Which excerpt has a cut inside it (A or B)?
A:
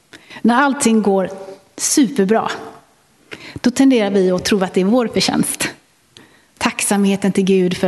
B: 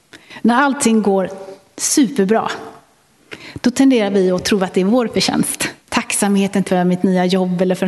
B